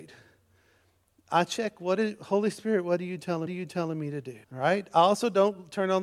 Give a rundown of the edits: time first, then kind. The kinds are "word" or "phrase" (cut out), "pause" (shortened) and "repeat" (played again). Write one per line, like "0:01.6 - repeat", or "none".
0:03.5 - repeat
0:04.4 - pause